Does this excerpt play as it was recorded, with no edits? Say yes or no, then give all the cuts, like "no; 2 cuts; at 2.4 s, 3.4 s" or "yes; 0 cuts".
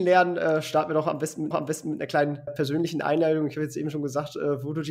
no; 2 cuts; at 1.5 s, 2.5 s